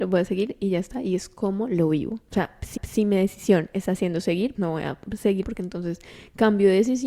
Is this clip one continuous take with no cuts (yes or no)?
no